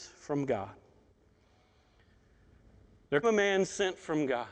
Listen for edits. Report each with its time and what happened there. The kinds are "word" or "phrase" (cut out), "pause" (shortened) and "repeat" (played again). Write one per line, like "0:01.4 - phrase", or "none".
0:03.2 - word